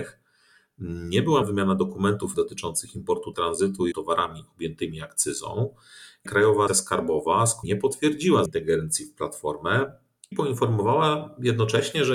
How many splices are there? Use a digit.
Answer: 9